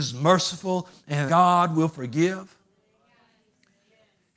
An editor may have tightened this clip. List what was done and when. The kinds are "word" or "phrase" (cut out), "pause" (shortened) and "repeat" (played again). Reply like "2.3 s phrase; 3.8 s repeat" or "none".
1.3 s word